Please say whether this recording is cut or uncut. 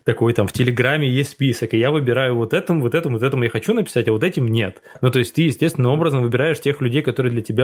uncut